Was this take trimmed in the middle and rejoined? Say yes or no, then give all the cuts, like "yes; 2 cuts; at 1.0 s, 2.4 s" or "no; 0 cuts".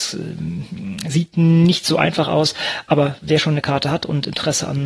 no; 0 cuts